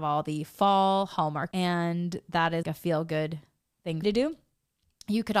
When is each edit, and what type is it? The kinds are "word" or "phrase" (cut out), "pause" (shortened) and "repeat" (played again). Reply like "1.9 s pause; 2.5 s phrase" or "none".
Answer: 1.5 s word; 2.6 s word; 4.0 s phrase